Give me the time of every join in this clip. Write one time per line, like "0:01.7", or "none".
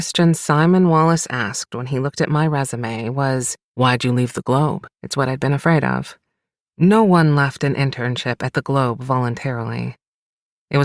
0:03.6
0:04.9